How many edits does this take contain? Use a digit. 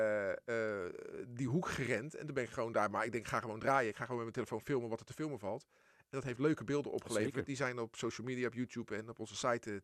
0